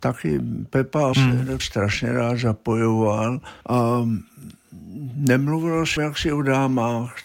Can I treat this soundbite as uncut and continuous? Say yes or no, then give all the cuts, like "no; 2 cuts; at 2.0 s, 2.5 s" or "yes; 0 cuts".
no; 4 cuts; at 1.1 s, 1.6 s, 3.6 s, 6.0 s